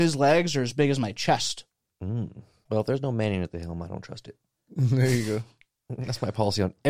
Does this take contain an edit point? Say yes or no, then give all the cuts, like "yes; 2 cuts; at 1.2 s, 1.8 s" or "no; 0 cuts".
no; 0 cuts